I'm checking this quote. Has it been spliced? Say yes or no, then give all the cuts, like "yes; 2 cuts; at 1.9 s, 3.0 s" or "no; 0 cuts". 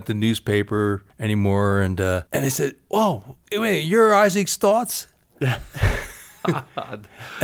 yes; 3 cuts; at 1.1 s, 2.3 s, 3.4 s